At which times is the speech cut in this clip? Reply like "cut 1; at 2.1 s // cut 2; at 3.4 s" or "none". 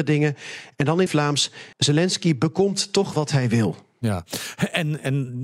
cut 1; at 1.1 s // cut 2; at 1.7 s // cut 3; at 3.1 s